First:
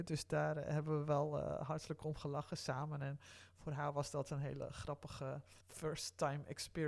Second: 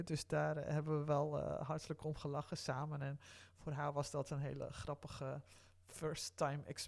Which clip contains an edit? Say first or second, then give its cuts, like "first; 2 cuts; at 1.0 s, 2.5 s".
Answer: first; 1 cut; at 5.6 s